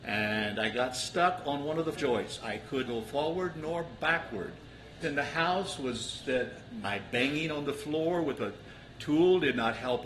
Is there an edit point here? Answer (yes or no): yes